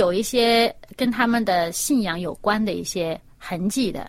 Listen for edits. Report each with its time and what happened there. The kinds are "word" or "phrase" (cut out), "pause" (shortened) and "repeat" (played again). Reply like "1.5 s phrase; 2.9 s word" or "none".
none